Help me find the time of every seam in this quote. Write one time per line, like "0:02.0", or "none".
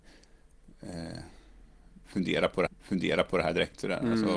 0:02.7